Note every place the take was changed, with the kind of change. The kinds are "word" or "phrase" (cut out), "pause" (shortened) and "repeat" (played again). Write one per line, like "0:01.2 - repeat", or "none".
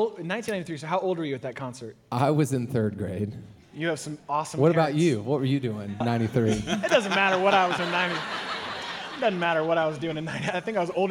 0:06.0 - word
0:07.8 - word